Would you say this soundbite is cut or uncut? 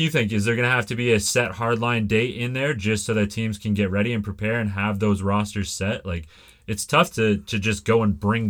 uncut